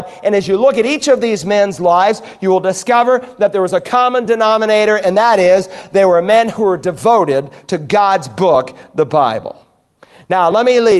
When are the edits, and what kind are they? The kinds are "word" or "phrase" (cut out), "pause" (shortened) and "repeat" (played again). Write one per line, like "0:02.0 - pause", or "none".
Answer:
none